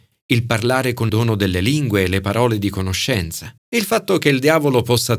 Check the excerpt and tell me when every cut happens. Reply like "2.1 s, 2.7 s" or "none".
1.1 s, 3.6 s